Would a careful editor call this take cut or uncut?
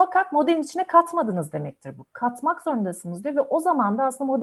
uncut